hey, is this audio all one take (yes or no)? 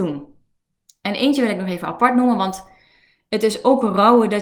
yes